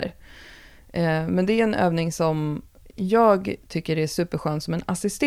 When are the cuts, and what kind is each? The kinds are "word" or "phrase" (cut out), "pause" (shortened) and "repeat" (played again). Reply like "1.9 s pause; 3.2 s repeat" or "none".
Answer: none